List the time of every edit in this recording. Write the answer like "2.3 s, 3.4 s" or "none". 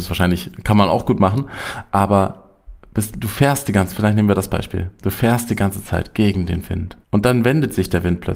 7.0 s